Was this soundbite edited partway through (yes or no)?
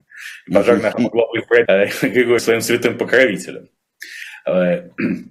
yes